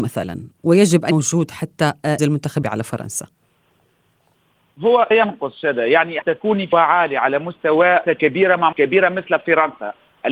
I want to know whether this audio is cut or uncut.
cut